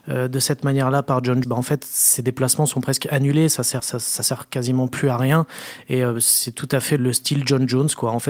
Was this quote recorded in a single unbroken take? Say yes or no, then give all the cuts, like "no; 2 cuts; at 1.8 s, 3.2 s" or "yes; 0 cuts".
no; 3 cuts; at 1.4 s, 3.8 s, 7.0 s